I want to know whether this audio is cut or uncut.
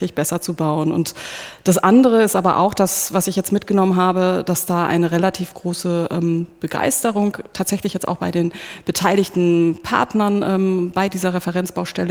uncut